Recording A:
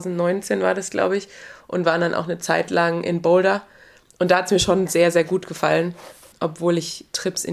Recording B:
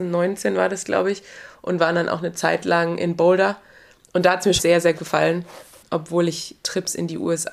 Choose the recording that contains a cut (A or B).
B